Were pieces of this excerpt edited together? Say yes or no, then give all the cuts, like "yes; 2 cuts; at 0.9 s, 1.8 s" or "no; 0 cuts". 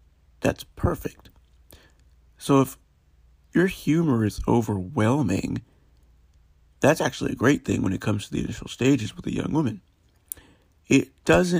no; 0 cuts